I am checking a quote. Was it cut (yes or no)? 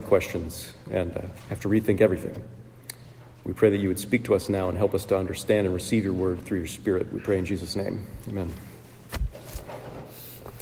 no